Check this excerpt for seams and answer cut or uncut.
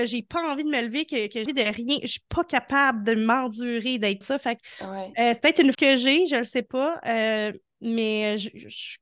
cut